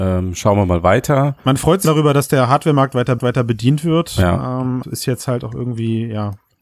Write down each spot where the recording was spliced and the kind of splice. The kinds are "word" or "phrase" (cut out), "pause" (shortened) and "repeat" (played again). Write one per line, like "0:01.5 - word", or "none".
0:01.4 - pause
0:01.8 - word
0:03.2 - repeat
0:04.8 - phrase